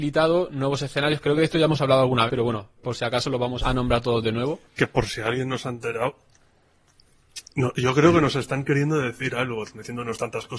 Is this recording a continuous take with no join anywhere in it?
no; 3 cuts; at 2.3 s, 2.8 s, 3.6 s

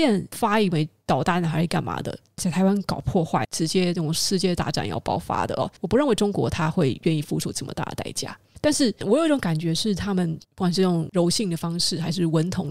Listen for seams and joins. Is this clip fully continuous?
no; 1 cut; at 10.4 s

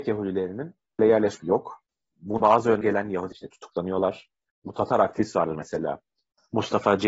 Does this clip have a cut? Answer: yes; 5 cuts; at 1.0 s, 1.4 s, 2.4 s, 2.8 s, 3.3 s

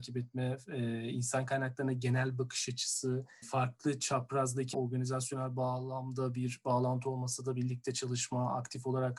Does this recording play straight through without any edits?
no; 2 cuts; at 3.4 s, 4.7 s

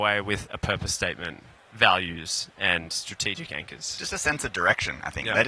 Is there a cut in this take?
no; 0 cuts

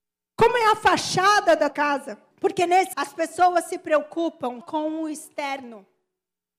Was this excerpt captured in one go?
no; 4 cuts; at 1.7 s, 2.3 s, 2.9 s, 4.6 s

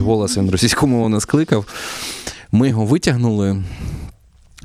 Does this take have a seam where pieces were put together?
no; 0 cuts

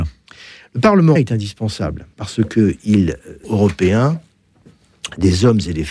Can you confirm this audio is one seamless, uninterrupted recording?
no; 3 cuts; at 1.1 s, 2.1 s, 3.4 s

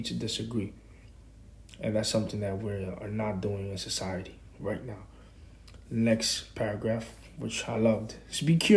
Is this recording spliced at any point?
no; 0 cuts

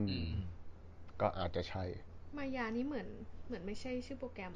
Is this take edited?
no; 0 cuts

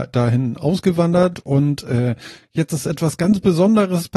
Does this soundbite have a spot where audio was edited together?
no; 0 cuts

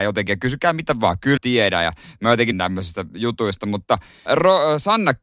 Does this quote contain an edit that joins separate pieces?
yes; 3 cuts; at 1.4 s, 2.5 s, 4.3 s

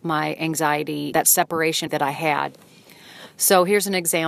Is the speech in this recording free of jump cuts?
no; 2 cuts; at 1.1 s, 1.9 s

